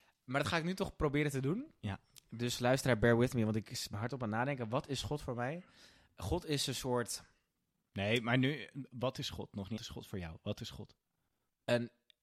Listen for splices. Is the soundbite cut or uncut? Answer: cut